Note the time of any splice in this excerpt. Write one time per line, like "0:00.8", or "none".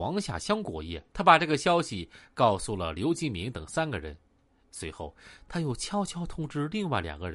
0:01.1